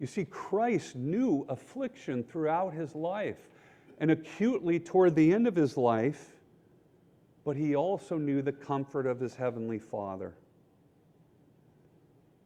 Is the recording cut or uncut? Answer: uncut